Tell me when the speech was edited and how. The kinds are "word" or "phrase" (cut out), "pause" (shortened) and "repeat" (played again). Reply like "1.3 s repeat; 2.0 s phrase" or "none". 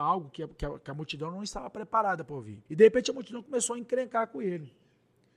2.7 s pause